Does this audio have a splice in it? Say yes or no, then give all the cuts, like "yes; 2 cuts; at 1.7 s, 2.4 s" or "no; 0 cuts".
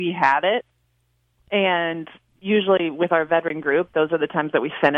no; 0 cuts